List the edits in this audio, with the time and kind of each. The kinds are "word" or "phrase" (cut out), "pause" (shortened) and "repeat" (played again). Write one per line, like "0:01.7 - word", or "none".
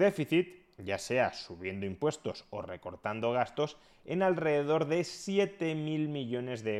none